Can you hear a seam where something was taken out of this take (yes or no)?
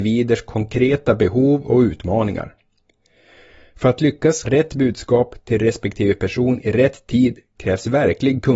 yes